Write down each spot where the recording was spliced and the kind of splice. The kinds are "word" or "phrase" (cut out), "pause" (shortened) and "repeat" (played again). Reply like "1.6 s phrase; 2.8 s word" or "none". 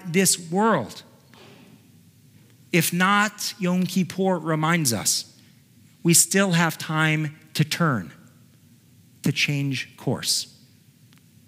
none

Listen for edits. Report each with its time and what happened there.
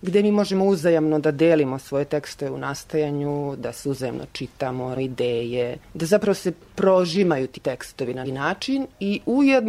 5.0 s word; 5.8 s pause; 7.6 s word; 8.2 s word

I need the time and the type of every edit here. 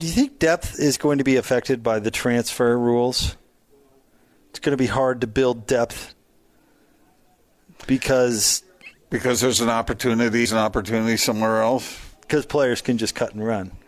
10.5 s word

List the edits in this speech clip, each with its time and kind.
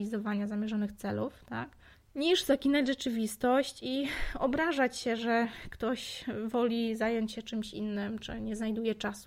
1.9 s pause

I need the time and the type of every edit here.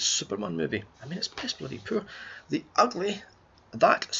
0.9 s pause

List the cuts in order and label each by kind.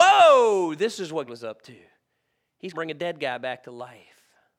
1.3 s word; 2.7 s word

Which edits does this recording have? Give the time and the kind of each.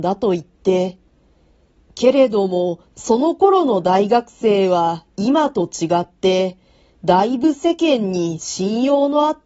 none

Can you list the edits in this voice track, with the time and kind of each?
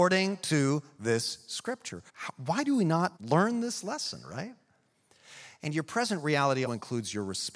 2.1 s pause; 3.2 s pause; 6.7 s word

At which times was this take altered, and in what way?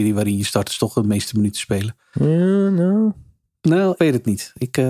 4.0 s word

